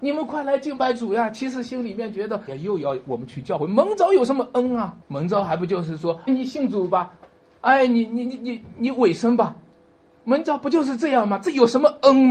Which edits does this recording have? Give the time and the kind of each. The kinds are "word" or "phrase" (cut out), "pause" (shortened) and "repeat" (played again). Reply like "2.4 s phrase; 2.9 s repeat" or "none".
2.5 s phrase; 5.0 s pause; 6.3 s word